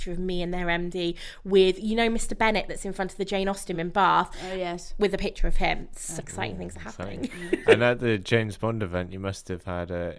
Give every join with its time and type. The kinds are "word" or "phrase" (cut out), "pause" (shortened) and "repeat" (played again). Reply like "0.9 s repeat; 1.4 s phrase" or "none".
3.7 s word; 6.2 s phrase